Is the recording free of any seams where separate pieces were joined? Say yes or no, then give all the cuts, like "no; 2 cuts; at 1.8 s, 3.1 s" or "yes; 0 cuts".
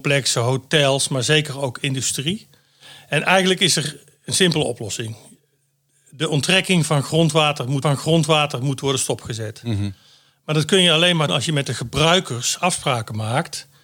no; 2 cuts; at 7.8 s, 11.3 s